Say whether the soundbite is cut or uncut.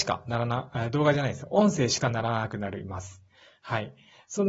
uncut